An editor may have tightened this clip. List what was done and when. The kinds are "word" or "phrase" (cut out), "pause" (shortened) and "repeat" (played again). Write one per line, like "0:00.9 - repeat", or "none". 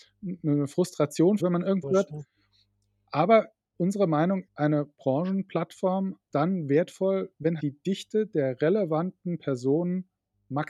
0:01.4 - word
0:01.8 - word
0:04.5 - word
0:06.3 - word
0:07.6 - word